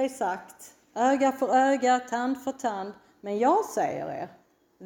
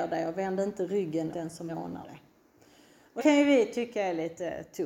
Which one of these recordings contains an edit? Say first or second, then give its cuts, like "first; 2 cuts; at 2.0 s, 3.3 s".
second; 4 cuts; at 1.3 s, 1.7 s, 2.0 s, 3.2 s